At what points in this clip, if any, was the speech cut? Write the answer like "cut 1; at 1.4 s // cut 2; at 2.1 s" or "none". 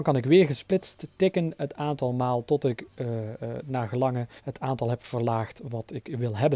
cut 1; at 4.4 s